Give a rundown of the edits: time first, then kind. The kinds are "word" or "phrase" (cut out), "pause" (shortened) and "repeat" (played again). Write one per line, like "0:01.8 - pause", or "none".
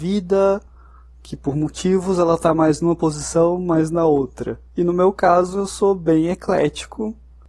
0:04.7 - pause